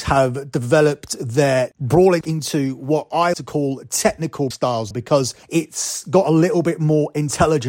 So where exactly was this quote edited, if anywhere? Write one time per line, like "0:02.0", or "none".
0:02.2
0:03.3
0:04.5
0:04.9
0:05.4